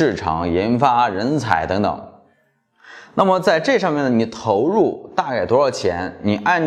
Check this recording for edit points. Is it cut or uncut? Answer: uncut